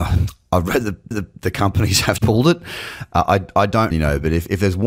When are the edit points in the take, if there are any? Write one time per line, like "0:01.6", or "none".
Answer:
0:01.1
0:02.2
0:03.9